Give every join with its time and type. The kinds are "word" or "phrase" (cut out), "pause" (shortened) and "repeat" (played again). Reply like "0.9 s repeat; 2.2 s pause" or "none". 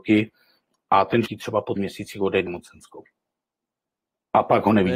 1.3 s word; 1.8 s word; 2.5 s word